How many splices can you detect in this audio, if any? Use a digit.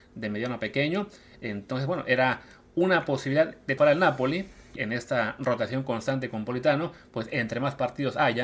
2